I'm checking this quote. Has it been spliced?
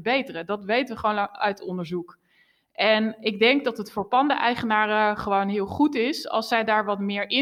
no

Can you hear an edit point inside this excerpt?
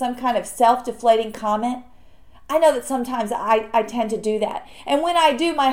no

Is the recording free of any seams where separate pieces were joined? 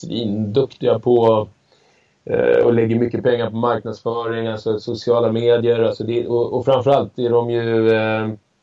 yes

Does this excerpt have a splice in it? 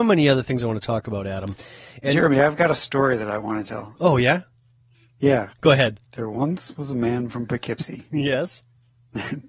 yes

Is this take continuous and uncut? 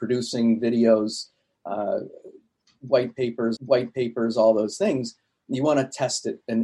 no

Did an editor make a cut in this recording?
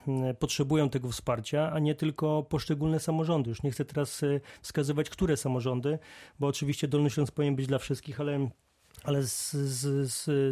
no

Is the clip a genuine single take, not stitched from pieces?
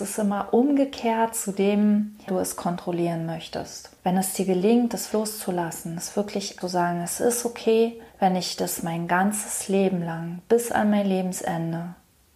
no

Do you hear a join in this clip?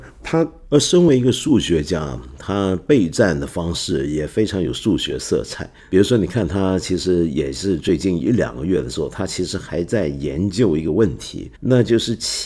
yes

